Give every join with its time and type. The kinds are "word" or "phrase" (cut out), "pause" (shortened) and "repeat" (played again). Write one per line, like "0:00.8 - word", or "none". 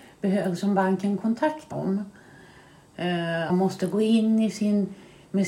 0:01.7 - word
0:03.5 - phrase